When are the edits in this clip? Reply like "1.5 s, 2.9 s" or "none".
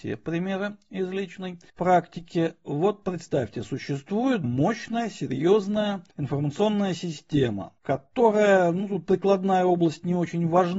1.7 s, 4.4 s, 6.1 s, 7.8 s